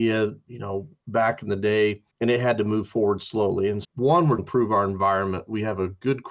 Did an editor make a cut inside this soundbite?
yes; 4 cuts; at 1.0 s, 2.1 s, 3.8 s, 4.4 s

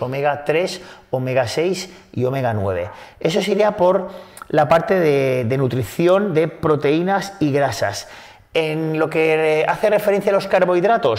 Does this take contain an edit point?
no; 0 cuts

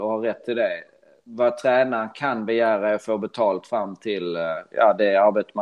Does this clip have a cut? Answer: no; 0 cuts

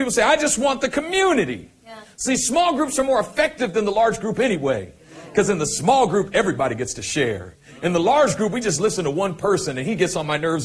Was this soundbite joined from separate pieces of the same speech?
no; 0 cuts

